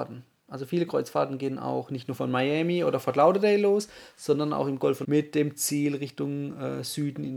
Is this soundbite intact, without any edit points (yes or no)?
no